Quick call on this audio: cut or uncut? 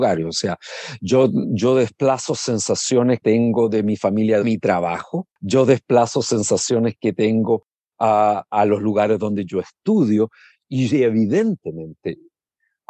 cut